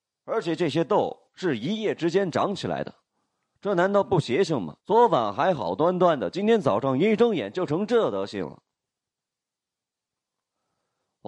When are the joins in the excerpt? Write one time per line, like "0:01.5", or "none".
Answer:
0:04.8